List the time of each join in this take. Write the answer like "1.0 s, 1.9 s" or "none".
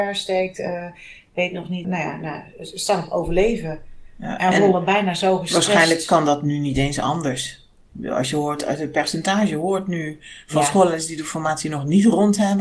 none

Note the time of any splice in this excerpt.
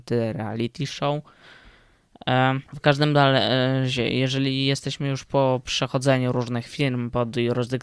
2.7 s

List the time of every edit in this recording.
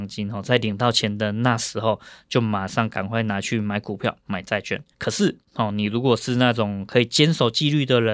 4.9 s

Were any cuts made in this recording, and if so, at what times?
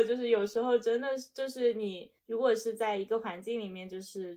2.2 s

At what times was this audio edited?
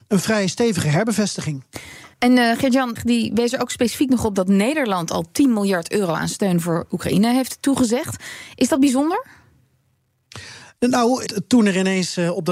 2.1 s, 3.0 s, 11.3 s

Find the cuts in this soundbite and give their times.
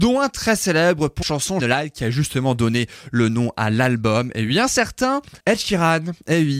1.2 s, 1.6 s, 5.4 s

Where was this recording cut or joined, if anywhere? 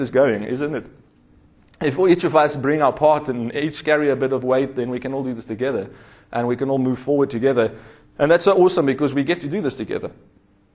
none

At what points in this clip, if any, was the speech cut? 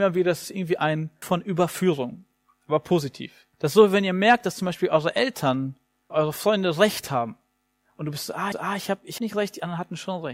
1.2 s, 3.5 s, 6.1 s, 8.5 s, 9.2 s

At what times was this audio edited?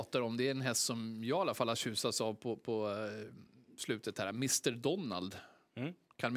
none

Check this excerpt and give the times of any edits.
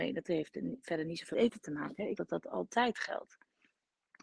1.3 s, 2.2 s

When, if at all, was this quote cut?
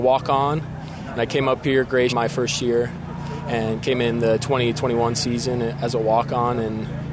1.2 s, 2.1 s

